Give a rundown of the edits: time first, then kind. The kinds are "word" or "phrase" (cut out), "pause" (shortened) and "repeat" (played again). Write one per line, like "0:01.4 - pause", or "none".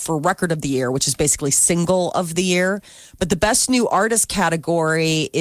none